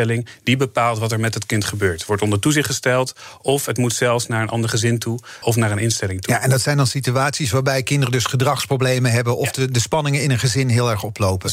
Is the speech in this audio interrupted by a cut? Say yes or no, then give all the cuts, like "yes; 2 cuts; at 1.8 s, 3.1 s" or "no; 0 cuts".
yes; 1 cut; at 5.4 s